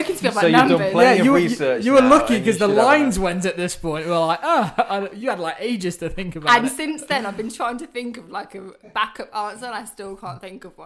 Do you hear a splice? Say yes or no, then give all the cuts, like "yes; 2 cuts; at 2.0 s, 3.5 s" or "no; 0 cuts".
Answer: no; 0 cuts